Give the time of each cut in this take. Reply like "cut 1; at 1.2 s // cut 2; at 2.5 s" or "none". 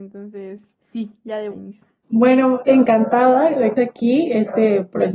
cut 1; at 0.9 s // cut 2; at 1.5 s // cut 3; at 2.7 s // cut 4; at 3.7 s